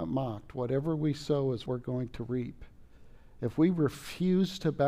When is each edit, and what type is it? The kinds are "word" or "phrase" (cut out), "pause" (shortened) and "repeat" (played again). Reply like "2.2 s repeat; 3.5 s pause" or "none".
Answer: 1.7 s word